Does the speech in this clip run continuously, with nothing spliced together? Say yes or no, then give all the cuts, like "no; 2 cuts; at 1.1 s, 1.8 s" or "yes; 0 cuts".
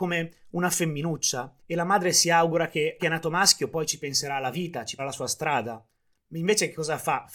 no; 3 cuts; at 1.6 s, 3.0 s, 5.0 s